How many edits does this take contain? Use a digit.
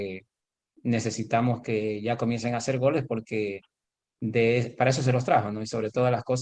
0